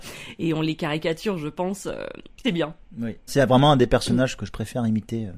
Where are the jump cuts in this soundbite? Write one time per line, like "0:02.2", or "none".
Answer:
0:02.4
0:03.3
0:04.4